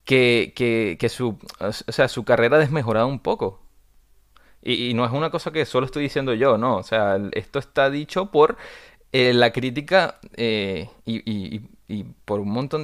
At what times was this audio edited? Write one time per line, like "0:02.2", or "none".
none